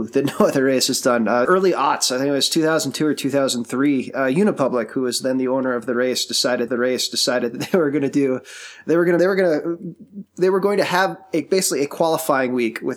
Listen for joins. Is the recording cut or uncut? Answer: cut